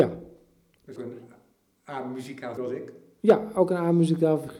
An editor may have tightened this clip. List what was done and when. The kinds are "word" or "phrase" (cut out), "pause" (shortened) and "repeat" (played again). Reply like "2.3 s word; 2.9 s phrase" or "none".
1.0 s word; 2.6 s word